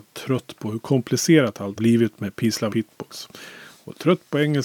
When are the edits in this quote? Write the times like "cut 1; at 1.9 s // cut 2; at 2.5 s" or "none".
cut 1; at 1.8 s // cut 2; at 2.7 s